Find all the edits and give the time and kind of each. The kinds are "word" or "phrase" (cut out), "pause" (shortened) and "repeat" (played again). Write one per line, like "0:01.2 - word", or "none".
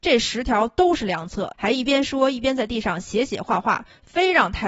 0:01.5 - pause